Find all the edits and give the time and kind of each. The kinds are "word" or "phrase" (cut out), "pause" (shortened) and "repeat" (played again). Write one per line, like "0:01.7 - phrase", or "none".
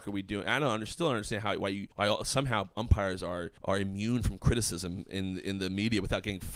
0:01.9 - pause
0:03.6 - pause